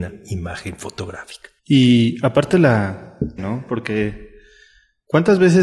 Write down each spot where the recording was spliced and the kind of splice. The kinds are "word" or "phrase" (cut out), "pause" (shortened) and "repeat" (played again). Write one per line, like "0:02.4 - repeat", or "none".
0:01.6 - pause
0:03.4 - word